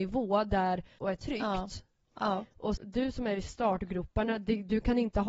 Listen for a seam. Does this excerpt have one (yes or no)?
yes